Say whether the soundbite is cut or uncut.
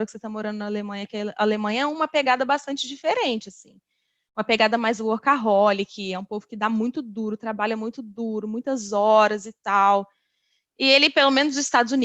uncut